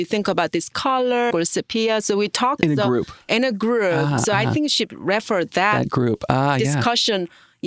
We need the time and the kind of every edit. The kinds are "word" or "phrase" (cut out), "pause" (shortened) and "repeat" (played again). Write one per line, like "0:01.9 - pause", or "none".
0:01.3 - phrase
0:02.6 - phrase